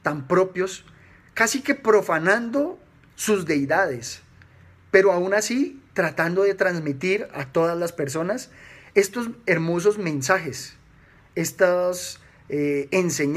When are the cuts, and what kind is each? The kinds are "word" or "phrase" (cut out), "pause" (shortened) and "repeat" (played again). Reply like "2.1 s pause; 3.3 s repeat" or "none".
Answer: none